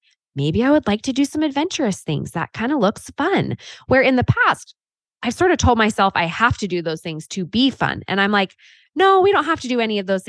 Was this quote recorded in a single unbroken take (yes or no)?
yes